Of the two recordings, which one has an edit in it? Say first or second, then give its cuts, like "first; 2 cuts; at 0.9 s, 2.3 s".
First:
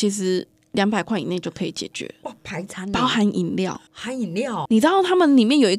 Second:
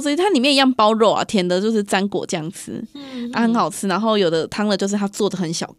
first; 2 cuts; at 3.9 s, 4.7 s